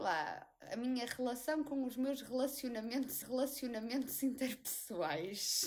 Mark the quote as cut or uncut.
cut